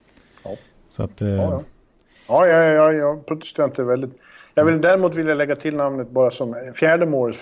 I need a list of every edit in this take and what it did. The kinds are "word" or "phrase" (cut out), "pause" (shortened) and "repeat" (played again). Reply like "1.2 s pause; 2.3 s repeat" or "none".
none